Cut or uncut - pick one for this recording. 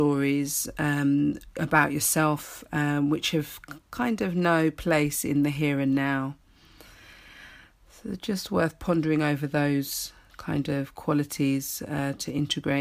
uncut